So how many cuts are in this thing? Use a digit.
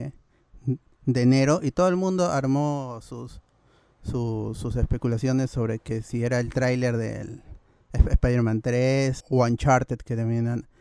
1